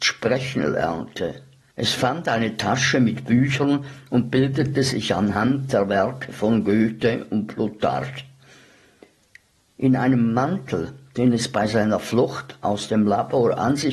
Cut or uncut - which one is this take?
uncut